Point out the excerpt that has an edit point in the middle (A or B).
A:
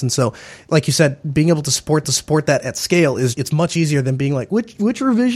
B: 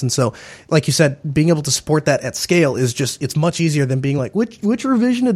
A